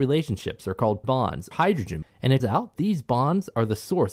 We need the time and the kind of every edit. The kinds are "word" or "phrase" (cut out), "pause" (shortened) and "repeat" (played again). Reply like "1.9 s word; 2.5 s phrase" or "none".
1.0 s word; 1.5 s word; 2.0 s word; 2.4 s word; 2.8 s word